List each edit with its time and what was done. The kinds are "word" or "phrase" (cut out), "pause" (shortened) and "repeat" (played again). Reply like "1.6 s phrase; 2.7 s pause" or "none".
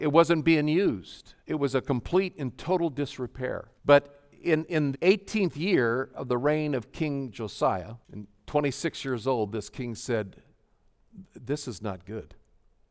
1.4 s pause; 3.8 s pause; 4.9 s word; 8.0 s pause